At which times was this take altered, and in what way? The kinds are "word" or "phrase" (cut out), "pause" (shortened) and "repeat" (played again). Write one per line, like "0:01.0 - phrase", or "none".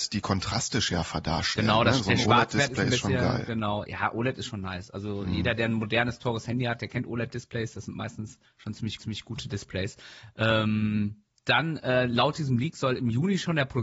0:08.4 - pause
0:09.0 - repeat
0:11.3 - pause

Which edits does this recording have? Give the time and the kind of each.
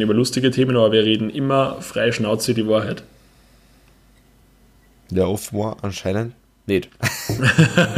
none

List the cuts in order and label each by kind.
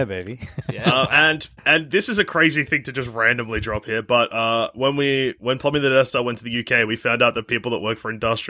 0:01.6 - pause

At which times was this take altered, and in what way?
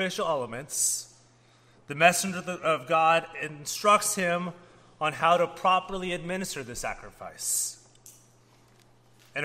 none

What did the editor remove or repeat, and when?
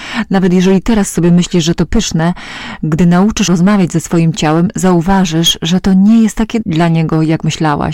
0:03.5 - word
0:06.6 - word

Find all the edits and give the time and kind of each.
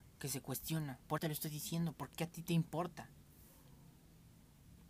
0:01.2 - word
0:02.1 - word

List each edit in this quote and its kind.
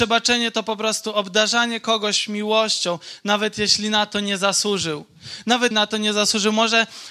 0:05.7 - word

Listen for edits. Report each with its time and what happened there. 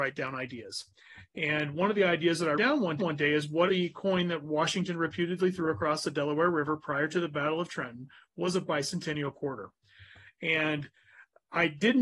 0:02.6 - word
0:03.0 - repeat
0:03.7 - word

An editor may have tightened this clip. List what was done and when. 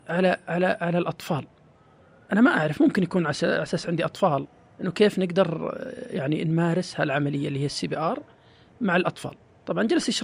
none

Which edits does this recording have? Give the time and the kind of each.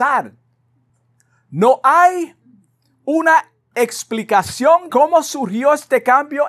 0:04.9 - word

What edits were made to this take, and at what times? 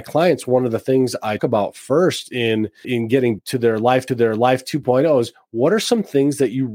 0:01.4 - word
0:02.8 - word
0:03.4 - word
0:04.1 - repeat

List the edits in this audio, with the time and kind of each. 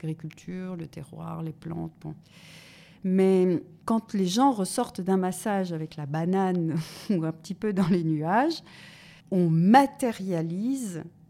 0:03.8 - pause
0:09.2 - pause

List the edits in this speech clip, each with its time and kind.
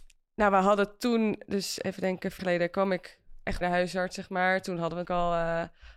0:02.4 - word
0:03.6 - word
0:05.0 - word

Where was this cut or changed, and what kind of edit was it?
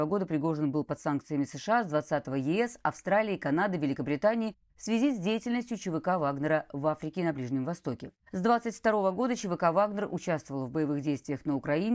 0:08.2 - pause

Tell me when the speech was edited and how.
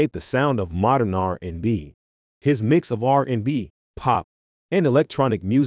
none

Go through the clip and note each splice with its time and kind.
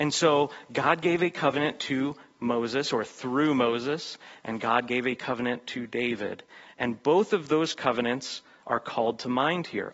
none

